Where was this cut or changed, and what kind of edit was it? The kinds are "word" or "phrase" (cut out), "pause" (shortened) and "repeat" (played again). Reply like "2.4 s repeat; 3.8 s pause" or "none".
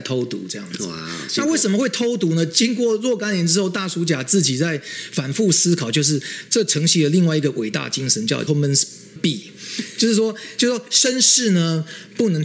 8.5 s word; 9.2 s word

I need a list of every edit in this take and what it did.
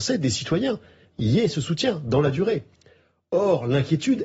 none

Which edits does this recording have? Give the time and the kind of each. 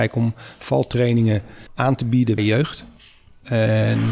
1.7 s pause; 2.4 s word

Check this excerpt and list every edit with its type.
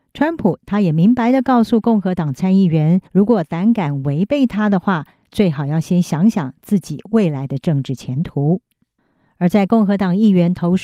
3.1 s pause

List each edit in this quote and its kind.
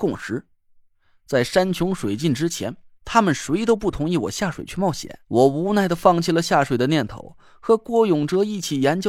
5.2 s pause

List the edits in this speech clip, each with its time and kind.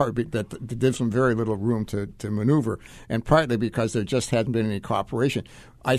none

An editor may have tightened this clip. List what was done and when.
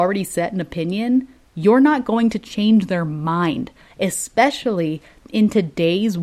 none

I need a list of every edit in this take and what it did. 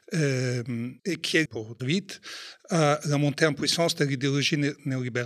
1.0 s pause; 1.5 s word; 1.8 s word

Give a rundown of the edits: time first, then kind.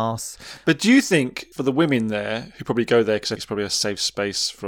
1.5 s pause; 3.4 s word

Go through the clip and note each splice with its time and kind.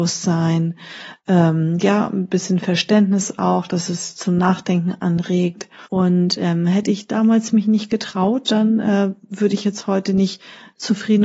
5.9 s pause

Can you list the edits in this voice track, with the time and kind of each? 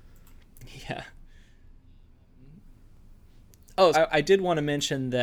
3.9 s word

